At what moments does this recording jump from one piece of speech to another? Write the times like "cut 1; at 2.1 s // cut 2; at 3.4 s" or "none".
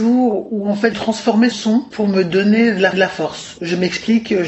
cut 1; at 0.9 s // cut 2; at 1.5 s // cut 3; at 2.9 s